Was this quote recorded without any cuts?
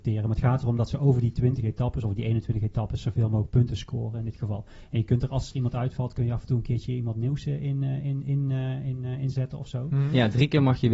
yes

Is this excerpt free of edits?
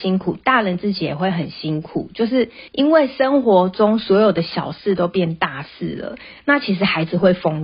no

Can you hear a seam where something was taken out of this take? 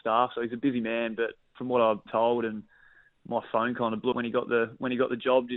yes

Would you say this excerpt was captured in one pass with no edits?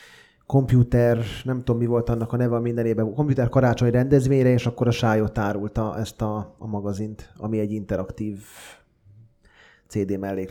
no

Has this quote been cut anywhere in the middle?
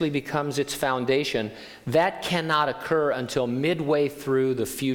no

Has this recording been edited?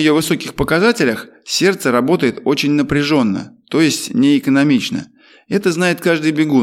no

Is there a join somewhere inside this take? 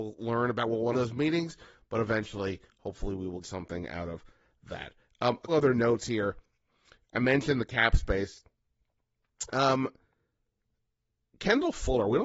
yes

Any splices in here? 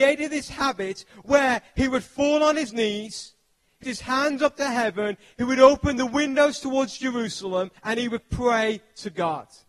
yes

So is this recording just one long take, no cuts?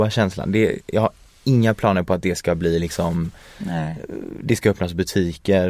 yes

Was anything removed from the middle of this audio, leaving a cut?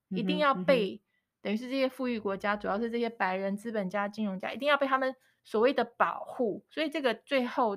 no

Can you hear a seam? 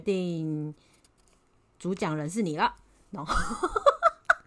no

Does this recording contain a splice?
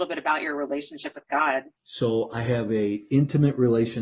yes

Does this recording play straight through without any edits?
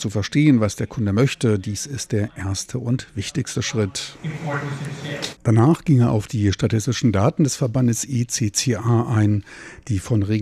no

